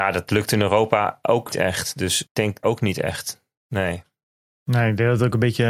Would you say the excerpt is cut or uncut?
cut